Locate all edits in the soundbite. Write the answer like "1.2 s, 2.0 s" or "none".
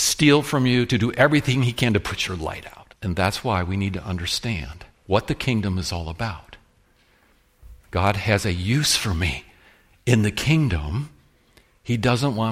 3.0 s, 4.9 s, 7.8 s